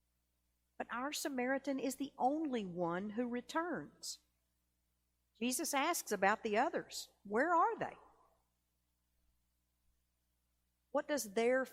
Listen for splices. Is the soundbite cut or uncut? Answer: uncut